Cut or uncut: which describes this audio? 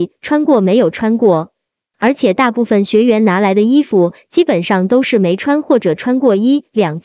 uncut